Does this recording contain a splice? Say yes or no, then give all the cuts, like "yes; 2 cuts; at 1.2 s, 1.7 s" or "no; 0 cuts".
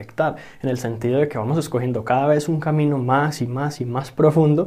no; 0 cuts